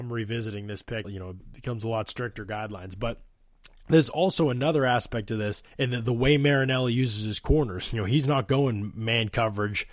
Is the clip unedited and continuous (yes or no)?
no